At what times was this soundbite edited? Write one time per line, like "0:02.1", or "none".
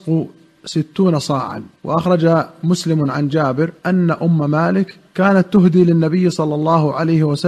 0:01.8
0:03.8
0:05.1

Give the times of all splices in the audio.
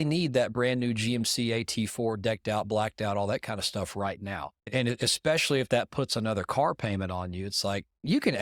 0:04.6

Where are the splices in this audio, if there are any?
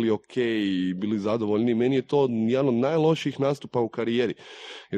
none

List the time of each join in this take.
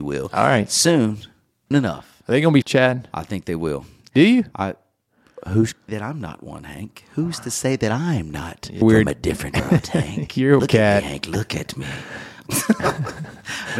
0:01.7
0:02.6
0:05.9
0:08.8
0:09.6
0:10.6

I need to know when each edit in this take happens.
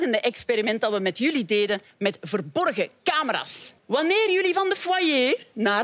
0:03.8

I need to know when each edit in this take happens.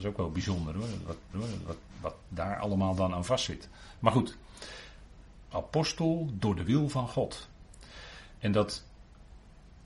0:01.3
0:05.5

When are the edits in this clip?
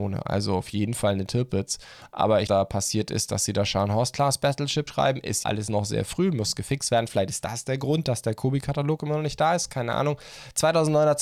0:02.5
0:04.9
0:05.4

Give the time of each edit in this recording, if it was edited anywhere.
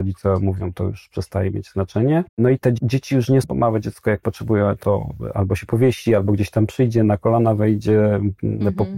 0:02.3
0:03.4

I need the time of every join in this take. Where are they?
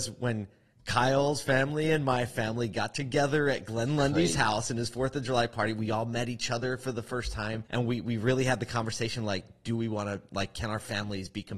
0:07.7

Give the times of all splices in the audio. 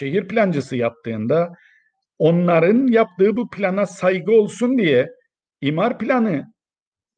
none

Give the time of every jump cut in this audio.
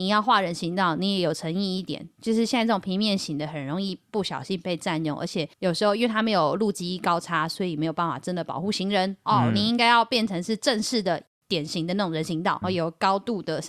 0:05.5
0:12.6

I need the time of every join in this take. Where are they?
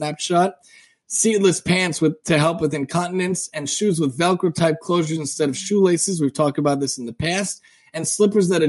none

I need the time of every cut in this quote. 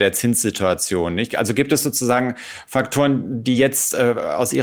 none

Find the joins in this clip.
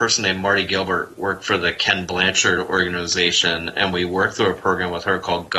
none

